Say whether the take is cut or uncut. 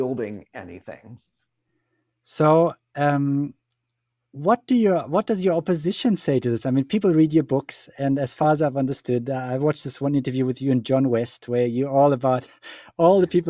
uncut